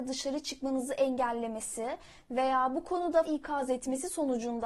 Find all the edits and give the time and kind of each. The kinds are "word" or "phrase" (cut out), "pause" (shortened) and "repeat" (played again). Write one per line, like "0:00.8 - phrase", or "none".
0:03.2 - word